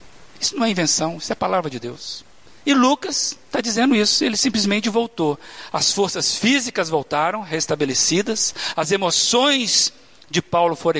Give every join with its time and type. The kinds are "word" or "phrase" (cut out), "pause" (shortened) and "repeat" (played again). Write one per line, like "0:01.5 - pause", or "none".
0:02.6 - pause